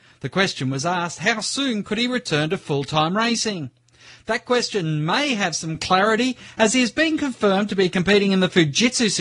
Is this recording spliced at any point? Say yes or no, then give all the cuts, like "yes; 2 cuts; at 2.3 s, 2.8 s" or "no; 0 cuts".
no; 0 cuts